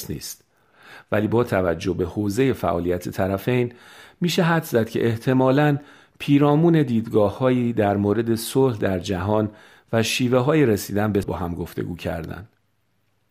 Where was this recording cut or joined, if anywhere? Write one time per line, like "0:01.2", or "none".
0:11.2